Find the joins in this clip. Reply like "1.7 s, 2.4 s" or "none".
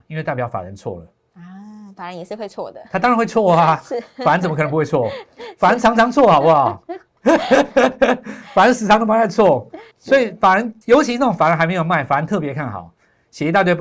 9.9 s, 10.8 s